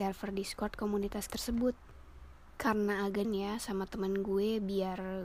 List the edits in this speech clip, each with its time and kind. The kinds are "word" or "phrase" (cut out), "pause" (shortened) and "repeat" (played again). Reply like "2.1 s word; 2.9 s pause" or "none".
1.3 s word; 3.2 s phrase